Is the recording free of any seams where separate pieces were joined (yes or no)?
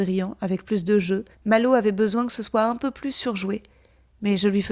no